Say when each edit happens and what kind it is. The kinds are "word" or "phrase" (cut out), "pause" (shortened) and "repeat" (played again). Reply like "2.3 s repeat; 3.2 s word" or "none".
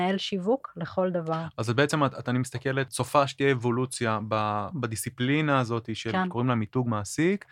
2.2 s word; 2.9 s word; 4.7 s word